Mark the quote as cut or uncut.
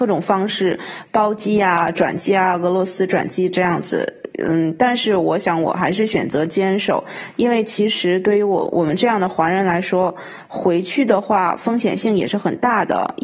uncut